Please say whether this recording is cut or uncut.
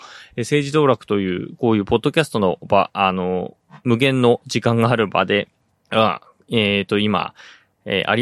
cut